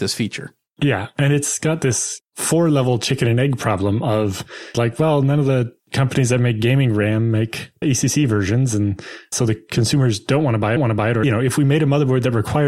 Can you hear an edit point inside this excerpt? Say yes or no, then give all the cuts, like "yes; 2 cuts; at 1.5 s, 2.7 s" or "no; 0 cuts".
yes; 6 cuts; at 4.7 s, 5.8 s, 7.8 s, 9.3 s, 10.8 s, 11.2 s